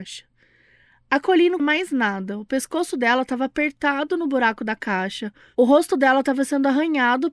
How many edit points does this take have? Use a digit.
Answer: 1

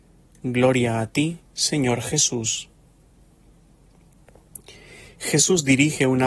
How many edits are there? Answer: 1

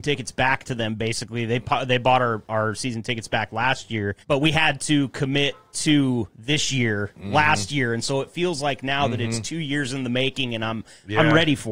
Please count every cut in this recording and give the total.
1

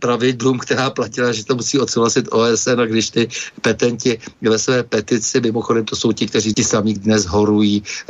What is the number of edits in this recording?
2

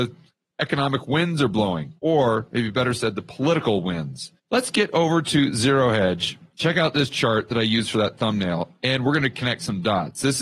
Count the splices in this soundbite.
2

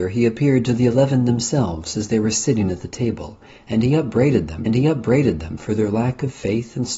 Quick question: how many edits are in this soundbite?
1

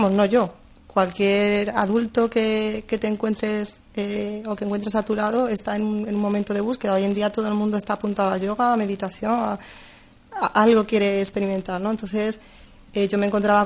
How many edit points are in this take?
0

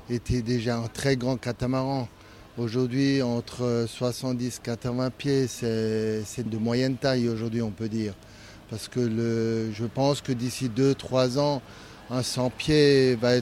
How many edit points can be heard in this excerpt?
2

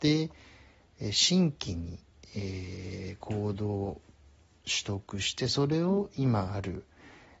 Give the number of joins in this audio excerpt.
0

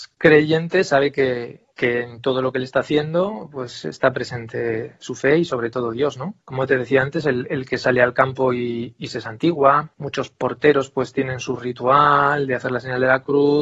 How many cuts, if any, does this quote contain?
3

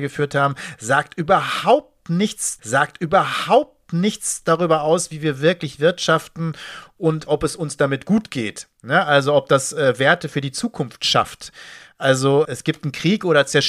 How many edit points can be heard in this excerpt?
3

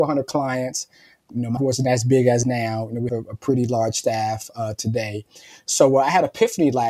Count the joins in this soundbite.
3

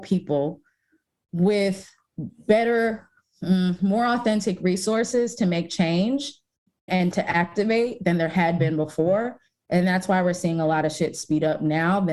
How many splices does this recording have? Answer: 1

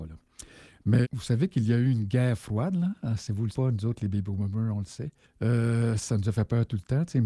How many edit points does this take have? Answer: 3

